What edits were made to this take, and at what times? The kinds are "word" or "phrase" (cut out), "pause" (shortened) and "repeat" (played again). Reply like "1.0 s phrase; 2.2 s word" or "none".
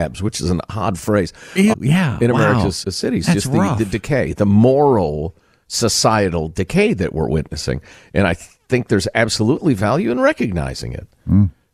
1.7 s word; 2.8 s word